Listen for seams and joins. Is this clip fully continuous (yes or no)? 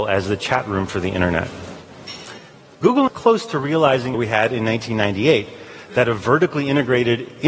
no